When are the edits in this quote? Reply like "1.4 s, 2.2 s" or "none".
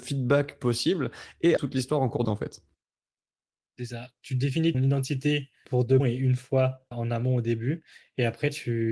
1.6 s, 2.2 s, 4.7 s, 5.7 s, 6.0 s, 6.9 s